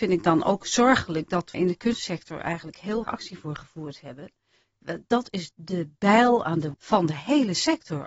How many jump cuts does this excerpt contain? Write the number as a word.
four